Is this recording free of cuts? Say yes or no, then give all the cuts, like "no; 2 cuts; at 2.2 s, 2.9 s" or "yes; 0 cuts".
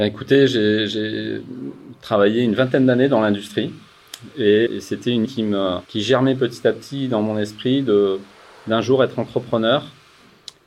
no; 3 cuts; at 4.7 s, 5.3 s, 5.8 s